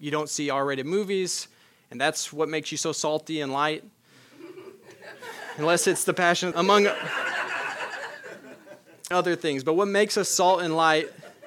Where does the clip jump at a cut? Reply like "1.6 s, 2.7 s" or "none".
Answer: 6.5 s, 9.1 s